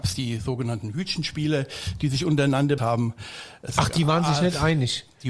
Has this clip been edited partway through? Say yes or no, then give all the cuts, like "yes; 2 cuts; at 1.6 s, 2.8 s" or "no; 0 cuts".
yes; 1 cut; at 2.8 s